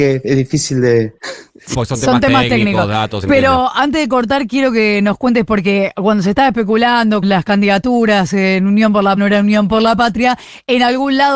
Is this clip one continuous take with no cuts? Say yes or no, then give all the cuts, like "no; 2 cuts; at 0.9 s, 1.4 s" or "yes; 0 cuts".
no; 5 cuts; at 1.2 s, 1.7 s, 3.2 s, 7.2 s, 9.2 s